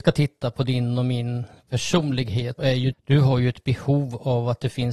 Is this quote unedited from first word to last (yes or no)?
no